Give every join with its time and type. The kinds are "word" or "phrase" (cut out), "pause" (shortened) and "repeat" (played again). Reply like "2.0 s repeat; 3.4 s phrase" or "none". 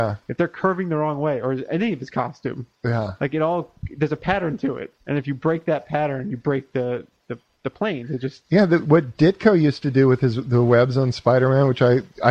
2.8 s pause; 5.0 s pause